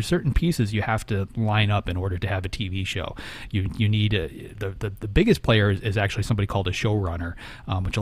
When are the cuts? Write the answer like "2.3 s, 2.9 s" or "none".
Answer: none

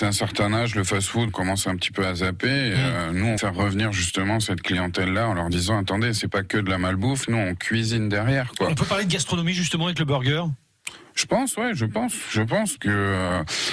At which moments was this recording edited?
1.3 s, 3.4 s, 12.8 s

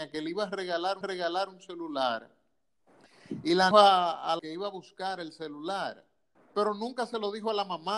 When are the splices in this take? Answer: 1.0 s, 3.7 s, 4.4 s, 6.4 s

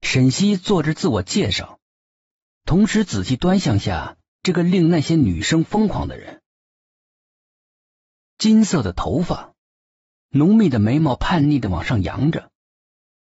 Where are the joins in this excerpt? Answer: none

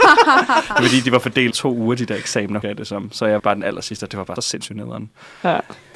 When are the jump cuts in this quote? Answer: 1.5 s, 2.6 s, 3.4 s, 4.4 s

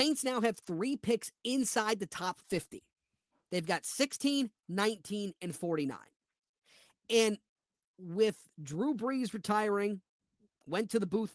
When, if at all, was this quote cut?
none

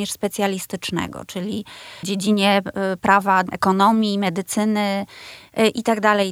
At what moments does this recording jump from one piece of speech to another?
2.0 s

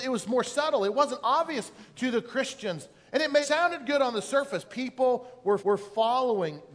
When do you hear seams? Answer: 3.4 s, 4.6 s, 5.6 s

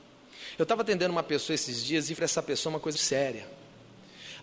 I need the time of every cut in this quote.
2.2 s, 2.9 s

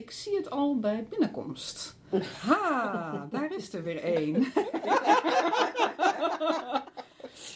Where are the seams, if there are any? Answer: none

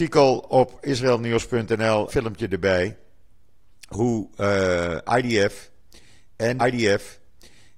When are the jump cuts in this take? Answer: 2.1 s, 6.6 s

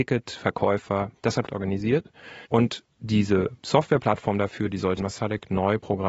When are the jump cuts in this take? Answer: 1.5 s, 2.5 s, 5.0 s

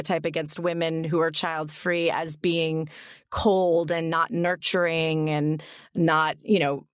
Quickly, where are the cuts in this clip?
none

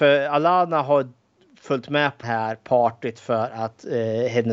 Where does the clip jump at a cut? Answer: 2.2 s

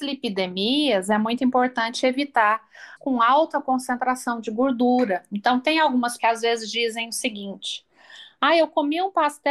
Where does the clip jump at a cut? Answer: 3.0 s, 6.2 s

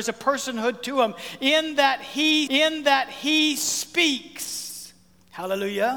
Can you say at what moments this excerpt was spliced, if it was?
2.5 s

